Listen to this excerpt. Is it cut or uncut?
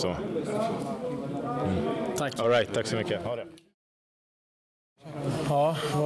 uncut